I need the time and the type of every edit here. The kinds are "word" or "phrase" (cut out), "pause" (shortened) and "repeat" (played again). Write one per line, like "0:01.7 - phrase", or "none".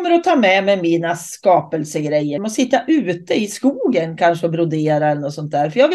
0:02.4 - word